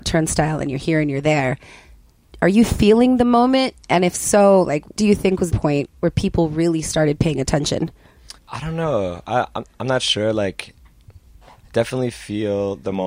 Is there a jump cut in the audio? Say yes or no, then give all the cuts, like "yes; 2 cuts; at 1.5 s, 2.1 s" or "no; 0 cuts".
yes; 3 cuts; at 4.9 s, 5.5 s, 8.4 s